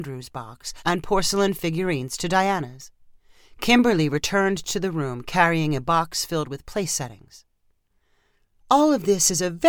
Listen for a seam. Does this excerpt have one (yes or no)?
no